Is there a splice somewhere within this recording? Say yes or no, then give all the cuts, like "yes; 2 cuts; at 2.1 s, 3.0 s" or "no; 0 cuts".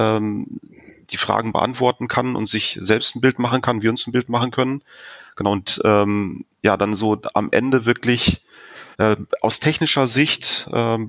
yes; 2 cuts; at 6.5 s, 8.9 s